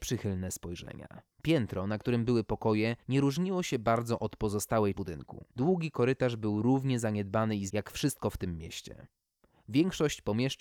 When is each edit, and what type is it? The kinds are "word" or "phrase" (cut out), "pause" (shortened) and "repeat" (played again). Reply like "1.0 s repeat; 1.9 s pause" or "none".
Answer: 1.3 s pause; 3.0 s pause; 4.9 s word; 5.5 s pause; 7.7 s word